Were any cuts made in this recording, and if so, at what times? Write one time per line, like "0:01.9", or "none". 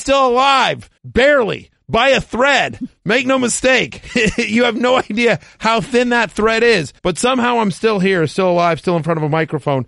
0:01.0
0:07.0